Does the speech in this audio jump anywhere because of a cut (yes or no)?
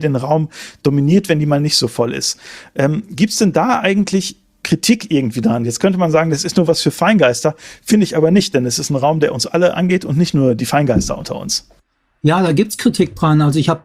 no